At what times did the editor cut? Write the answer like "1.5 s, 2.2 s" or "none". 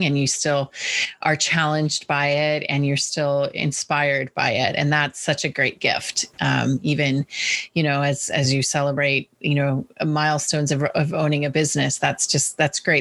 none